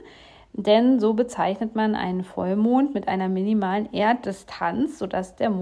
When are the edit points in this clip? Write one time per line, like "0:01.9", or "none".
none